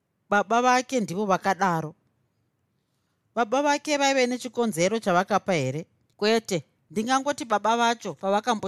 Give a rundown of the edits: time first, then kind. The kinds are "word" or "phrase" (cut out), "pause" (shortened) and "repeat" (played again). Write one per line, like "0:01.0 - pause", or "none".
0:06.1 - pause